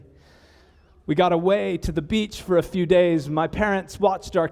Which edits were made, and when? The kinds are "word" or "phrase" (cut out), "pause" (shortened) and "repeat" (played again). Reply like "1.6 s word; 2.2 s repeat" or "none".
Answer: none